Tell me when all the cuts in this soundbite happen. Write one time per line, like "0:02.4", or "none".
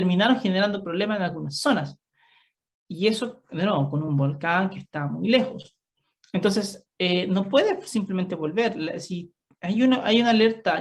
none